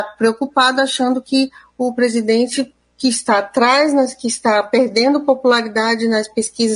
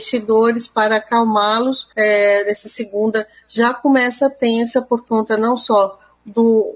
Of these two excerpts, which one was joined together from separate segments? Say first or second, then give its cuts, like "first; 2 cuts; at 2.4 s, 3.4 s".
second; 1 cut; at 1.9 s